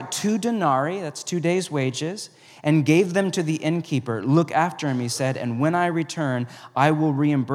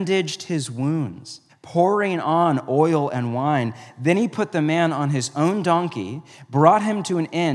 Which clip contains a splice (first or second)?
second